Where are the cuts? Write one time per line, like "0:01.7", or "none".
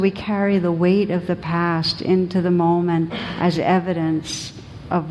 none